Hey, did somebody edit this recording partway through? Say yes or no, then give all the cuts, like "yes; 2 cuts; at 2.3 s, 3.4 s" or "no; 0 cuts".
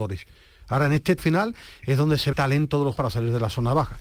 yes; 3 cuts; at 1.2 s, 2.3 s, 3.0 s